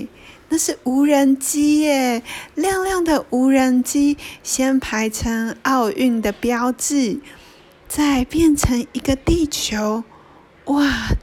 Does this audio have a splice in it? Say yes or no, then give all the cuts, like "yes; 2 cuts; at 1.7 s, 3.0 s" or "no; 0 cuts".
no; 0 cuts